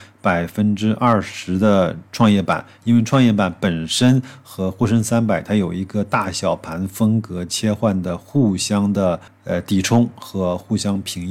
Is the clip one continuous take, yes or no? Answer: no